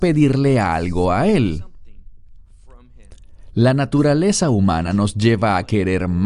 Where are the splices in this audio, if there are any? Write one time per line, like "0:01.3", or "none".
none